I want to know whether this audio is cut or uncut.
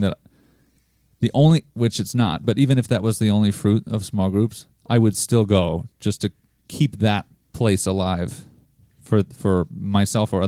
uncut